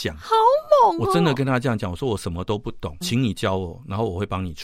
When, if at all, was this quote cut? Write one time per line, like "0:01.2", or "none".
0:03.0